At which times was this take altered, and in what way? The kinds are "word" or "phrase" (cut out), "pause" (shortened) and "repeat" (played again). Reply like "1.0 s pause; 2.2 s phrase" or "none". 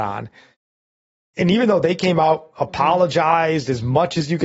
none